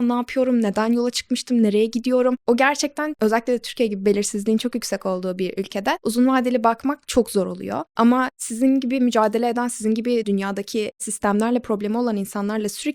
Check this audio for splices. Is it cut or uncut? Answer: uncut